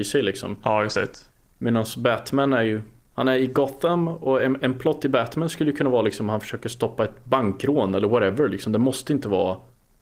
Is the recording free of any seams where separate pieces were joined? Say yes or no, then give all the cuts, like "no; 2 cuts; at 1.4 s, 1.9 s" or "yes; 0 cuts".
yes; 0 cuts